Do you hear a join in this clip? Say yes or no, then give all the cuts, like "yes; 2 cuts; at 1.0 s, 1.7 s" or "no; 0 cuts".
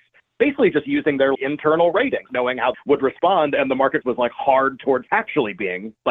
yes; 5 cuts; at 1.3 s, 2.3 s, 2.7 s, 4.0 s, 5.1 s